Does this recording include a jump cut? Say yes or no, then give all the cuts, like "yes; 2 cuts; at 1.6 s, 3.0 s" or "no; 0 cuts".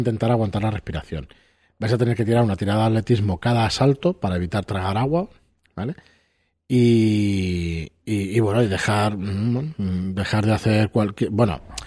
no; 0 cuts